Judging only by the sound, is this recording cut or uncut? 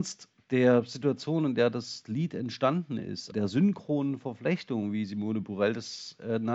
cut